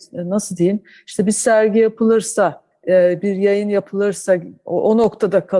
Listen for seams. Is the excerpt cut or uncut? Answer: uncut